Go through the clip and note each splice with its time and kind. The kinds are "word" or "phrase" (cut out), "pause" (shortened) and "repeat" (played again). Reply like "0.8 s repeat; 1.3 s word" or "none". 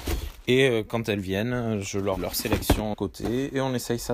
2.2 s word; 2.9 s word